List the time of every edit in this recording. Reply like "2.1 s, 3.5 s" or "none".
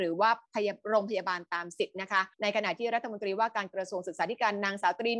2.3 s